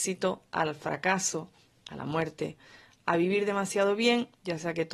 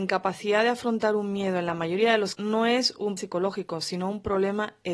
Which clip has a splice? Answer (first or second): second